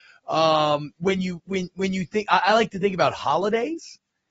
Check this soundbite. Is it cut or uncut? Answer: uncut